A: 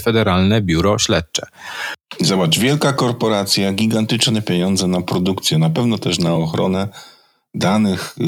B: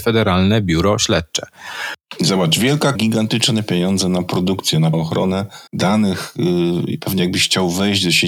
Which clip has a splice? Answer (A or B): B